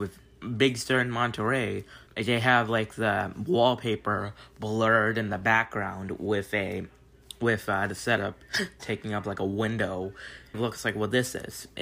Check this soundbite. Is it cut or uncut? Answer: cut